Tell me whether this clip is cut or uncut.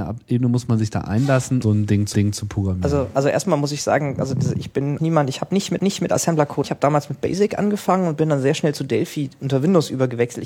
cut